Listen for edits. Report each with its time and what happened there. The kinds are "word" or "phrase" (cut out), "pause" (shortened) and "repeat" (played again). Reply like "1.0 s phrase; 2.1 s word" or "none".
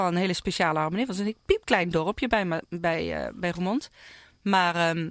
none

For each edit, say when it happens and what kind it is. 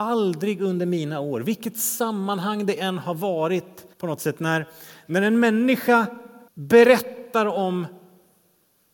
3.9 s pause; 6.5 s pause

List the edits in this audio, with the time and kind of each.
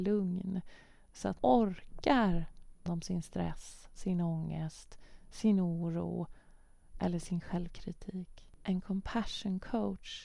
1.4 s word; 2.9 s word

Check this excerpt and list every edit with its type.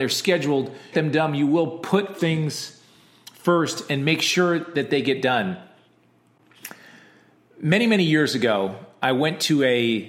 0.9 s phrase; 2.2 s word

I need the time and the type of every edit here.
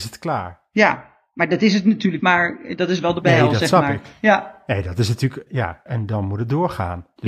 2.2 s word; 2.8 s word; 3.2 s word; 5.5 s word; 5.9 s word

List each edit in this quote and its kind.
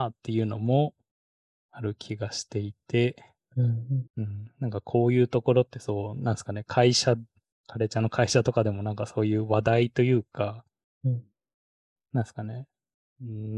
4.1 s pause

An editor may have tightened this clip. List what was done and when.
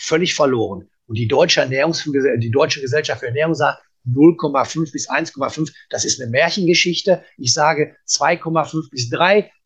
none

